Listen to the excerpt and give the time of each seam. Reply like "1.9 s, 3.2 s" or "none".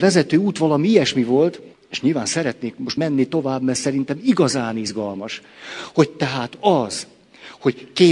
1.7 s, 3.0 s

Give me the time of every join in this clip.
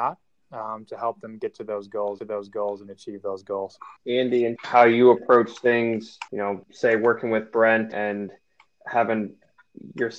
2.2 s, 4.0 s, 4.6 s, 6.3 s, 6.6 s, 7.9 s

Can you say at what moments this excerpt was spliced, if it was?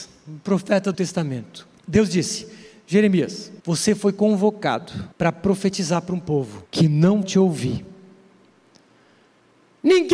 0.9 s, 1.8 s, 3.6 s, 5.1 s, 6.7 s, 7.2 s

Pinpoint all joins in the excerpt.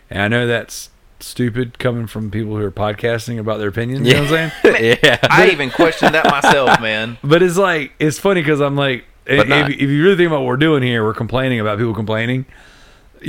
none

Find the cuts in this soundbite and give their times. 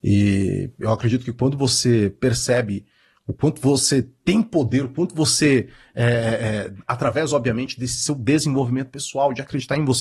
none

